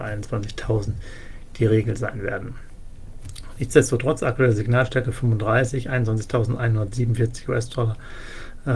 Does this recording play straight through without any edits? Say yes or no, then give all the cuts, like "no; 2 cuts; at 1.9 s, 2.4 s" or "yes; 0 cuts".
yes; 0 cuts